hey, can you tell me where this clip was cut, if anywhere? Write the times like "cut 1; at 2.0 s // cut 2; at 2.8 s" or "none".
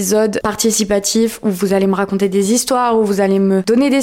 none